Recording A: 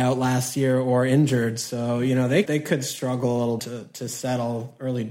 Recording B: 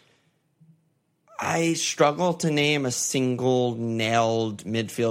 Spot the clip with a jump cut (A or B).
A